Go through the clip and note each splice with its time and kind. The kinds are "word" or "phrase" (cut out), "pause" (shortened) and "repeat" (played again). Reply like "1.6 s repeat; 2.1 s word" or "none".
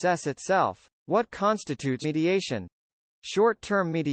0.9 s pause; 2.0 s word